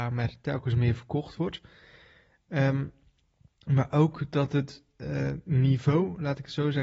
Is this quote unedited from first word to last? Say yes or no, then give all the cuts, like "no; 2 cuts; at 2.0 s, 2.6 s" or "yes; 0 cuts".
yes; 0 cuts